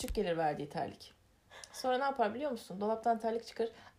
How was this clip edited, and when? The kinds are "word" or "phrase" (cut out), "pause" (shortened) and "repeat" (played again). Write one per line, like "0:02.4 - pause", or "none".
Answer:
none